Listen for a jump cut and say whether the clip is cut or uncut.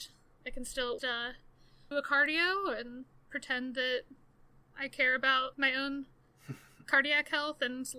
cut